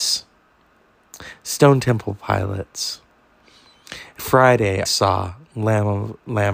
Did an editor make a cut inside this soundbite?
yes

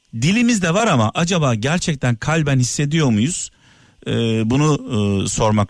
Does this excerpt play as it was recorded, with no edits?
yes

